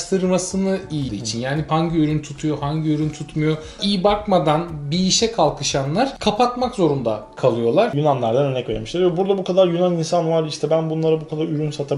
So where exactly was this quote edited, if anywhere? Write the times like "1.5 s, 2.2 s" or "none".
1.1 s, 1.7 s, 3.8 s